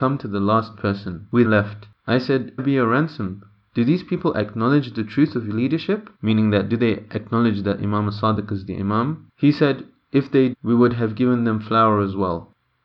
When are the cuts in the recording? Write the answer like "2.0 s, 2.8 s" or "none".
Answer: 1.4 s, 2.6 s, 6.1 s, 10.5 s